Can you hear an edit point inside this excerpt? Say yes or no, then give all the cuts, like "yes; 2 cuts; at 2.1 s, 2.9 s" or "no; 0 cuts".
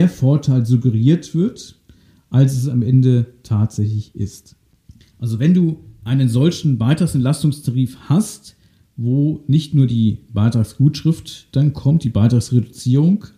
no; 0 cuts